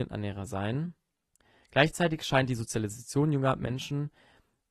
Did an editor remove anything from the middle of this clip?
no; 0 cuts

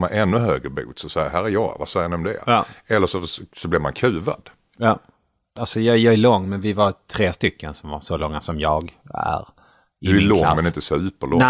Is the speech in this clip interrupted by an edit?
no; 0 cuts

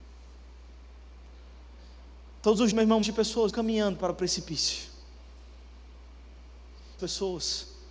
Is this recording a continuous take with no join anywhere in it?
no; 4 cuts; at 2.7 s, 3.0 s, 3.5 s, 7.0 s

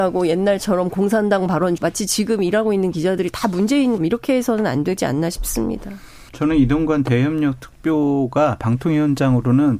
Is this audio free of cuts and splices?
no; 3 cuts; at 1.8 s, 4.0 s, 6.3 s

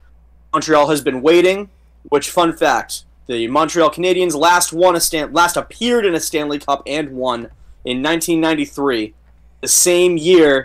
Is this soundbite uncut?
yes; 0 cuts

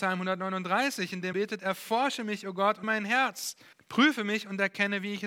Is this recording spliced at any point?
yes; 3 cuts; at 1.3 s, 2.8 s, 3.7 s

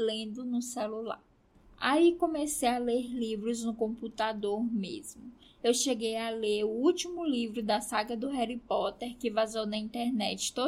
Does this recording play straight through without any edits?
yes; 0 cuts

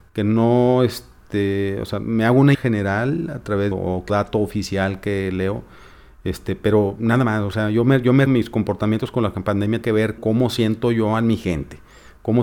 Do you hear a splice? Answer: yes; 6 cuts; at 2.5 s, 3.7 s, 4.1 s, 8.3 s, 9.8 s, 10.2 s

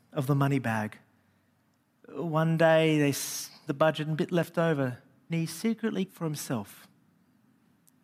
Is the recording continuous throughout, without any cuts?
no; 3 cuts; at 3.7 s, 5.3 s, 6.1 s

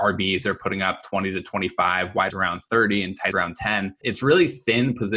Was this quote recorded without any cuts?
no; 3 cuts; at 2.3 s, 3.3 s, 4.0 s

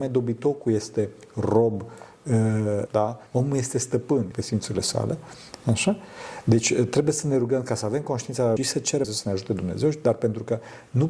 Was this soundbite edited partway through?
yes; 5 cuts; at 2.9 s, 3.3 s, 4.3 s, 8.6 s, 9.0 s

